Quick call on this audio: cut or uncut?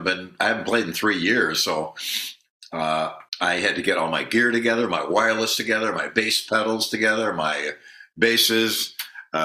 cut